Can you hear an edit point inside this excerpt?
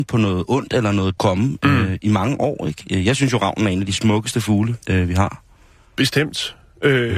yes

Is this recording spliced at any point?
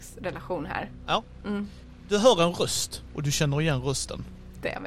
no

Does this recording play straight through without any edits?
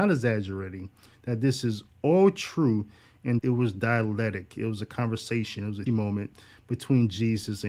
no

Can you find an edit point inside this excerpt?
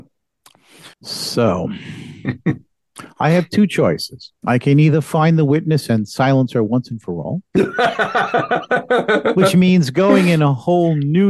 yes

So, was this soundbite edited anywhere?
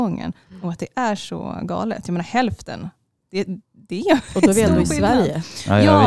no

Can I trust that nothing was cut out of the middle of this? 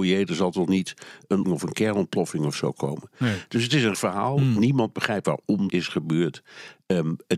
no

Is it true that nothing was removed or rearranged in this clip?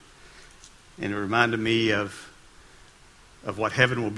yes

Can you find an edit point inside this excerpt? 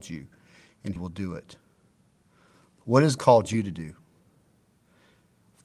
yes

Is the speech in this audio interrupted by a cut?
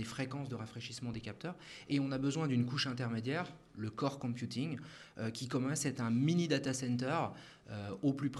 no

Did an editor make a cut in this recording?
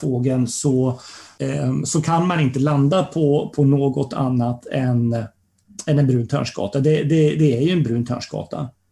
no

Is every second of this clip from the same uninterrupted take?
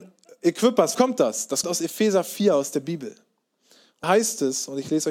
no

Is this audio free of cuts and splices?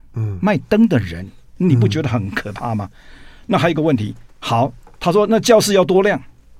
yes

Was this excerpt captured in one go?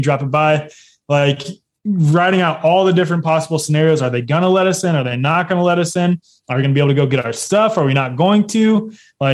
yes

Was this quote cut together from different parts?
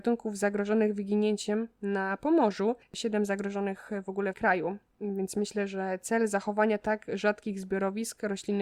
yes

